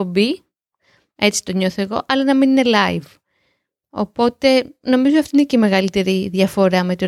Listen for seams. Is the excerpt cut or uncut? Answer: uncut